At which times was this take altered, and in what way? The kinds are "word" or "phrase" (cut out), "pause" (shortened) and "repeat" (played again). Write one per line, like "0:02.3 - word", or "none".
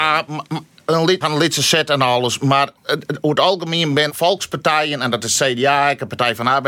0:01.2 - word
0:02.8 - pause
0:04.1 - word